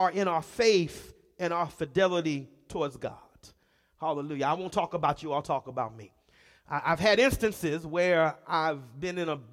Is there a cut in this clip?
no; 0 cuts

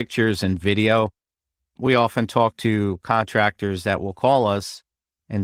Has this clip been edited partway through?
no; 0 cuts

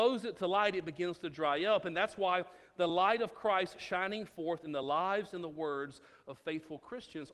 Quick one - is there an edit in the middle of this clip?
no; 0 cuts

